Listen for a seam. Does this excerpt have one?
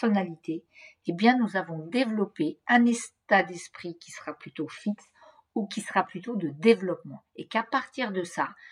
no; 0 cuts

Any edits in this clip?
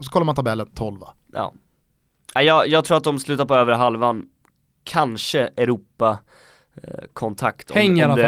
no; 0 cuts

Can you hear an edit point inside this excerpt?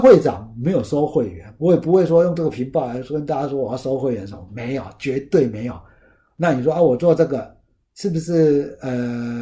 no; 0 cuts

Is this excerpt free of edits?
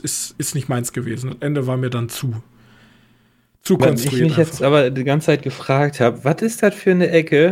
yes; 0 cuts

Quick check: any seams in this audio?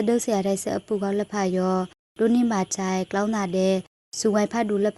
no; 0 cuts

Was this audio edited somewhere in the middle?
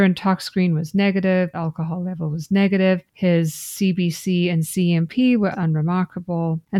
yes; 2 cuts; at 1.5 s, 5.5 s

